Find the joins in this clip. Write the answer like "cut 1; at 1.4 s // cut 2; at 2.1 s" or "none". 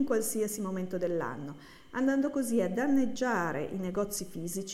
none